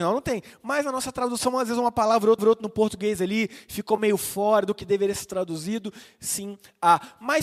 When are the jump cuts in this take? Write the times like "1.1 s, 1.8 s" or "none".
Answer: 2.4 s